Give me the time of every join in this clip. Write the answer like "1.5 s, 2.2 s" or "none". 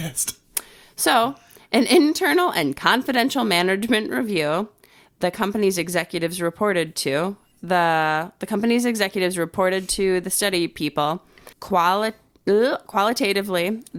7.5 s, 11.5 s